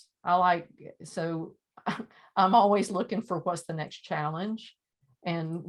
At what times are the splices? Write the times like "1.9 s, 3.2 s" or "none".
none